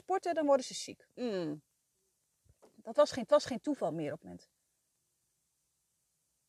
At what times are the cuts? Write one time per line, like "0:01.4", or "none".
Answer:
0:01.1
0:03.3
0:04.2